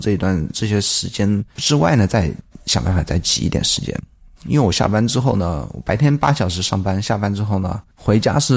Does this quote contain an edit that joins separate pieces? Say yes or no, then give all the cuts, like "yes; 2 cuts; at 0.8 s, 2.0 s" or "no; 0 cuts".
no; 0 cuts